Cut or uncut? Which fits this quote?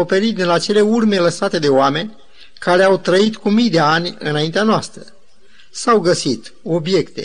uncut